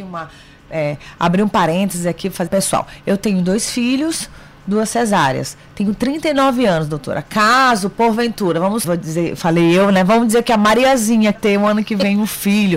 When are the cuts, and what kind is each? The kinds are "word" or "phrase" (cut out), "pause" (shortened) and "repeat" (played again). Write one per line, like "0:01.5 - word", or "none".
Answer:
0:02.5 - phrase
0:08.8 - word
0:11.3 - word

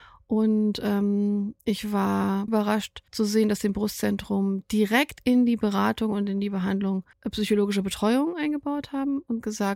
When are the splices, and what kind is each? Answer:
0:01.6 - pause
0:02.5 - word
0:03.1 - pause
0:07.1 - pause

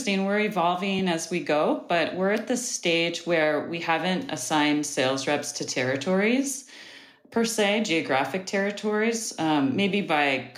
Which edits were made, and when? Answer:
none

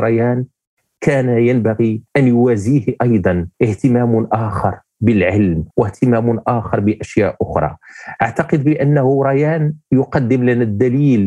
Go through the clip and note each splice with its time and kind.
0:02.1 - pause
0:03.5 - pause
0:05.7 - pause

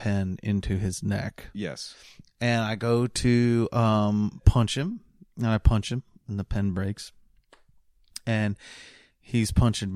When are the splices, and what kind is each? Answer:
none

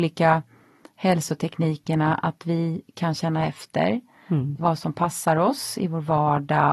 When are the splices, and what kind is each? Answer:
none

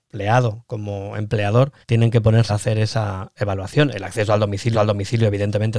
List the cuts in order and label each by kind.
0:01.8 - pause
0:02.5 - phrase
0:03.4 - word
0:04.7 - repeat

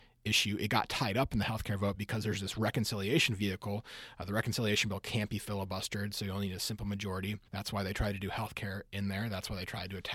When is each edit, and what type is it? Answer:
0:07.5 - pause

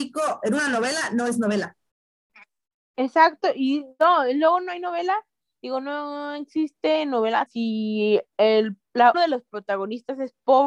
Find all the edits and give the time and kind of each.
0:07.5 - word
0:09.1 - word

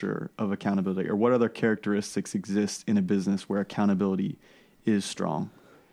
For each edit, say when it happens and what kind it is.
none

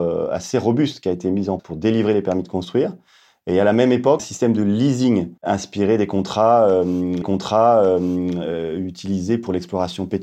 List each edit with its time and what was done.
0:01.6 - word
0:04.2 - word
0:05.4 - pause
0:07.2 - repeat

